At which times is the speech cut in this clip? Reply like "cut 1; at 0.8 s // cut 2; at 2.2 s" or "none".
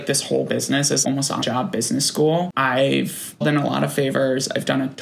cut 1; at 1.0 s // cut 2; at 1.4 s // cut 3; at 3.4 s